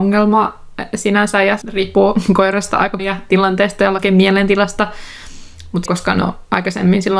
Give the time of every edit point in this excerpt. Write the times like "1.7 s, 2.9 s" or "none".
1.6 s, 3.0 s, 5.9 s